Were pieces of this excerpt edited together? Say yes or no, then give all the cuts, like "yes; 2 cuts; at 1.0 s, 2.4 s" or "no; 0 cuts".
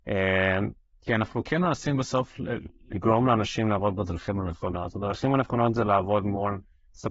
yes; 1 cut; at 0.9 s